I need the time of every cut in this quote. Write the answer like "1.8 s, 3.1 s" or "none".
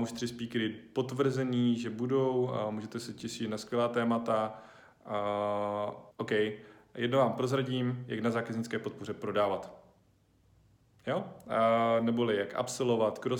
6.1 s